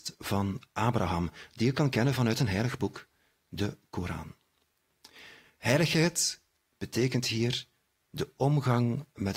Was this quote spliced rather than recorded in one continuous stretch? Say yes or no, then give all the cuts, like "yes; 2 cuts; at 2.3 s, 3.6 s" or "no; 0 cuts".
no; 0 cuts